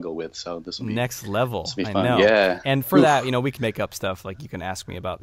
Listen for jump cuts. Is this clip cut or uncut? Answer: cut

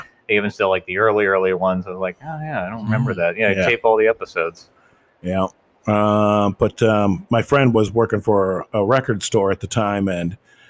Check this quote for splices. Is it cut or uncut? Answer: uncut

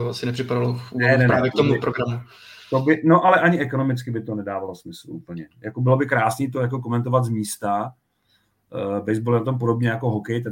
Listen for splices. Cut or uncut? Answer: uncut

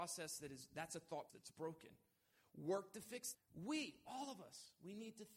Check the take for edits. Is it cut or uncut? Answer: cut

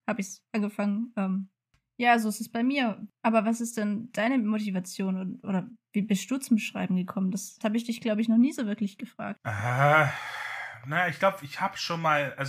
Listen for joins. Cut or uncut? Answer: uncut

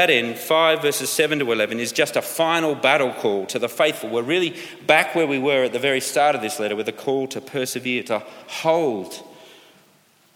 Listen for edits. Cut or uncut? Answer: uncut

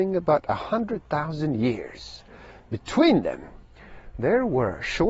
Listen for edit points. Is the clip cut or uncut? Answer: uncut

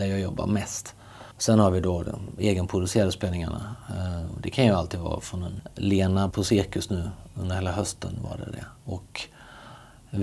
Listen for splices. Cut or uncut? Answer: cut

